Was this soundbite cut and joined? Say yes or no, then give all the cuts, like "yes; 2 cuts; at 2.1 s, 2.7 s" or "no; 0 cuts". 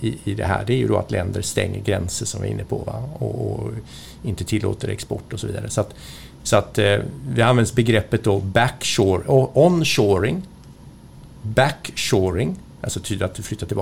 no; 0 cuts